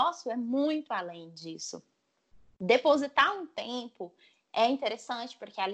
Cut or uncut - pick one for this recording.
uncut